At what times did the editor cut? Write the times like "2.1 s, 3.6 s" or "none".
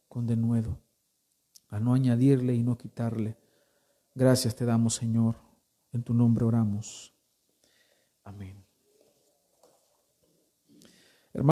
none